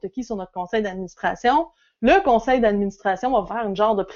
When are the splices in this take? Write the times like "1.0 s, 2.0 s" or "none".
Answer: none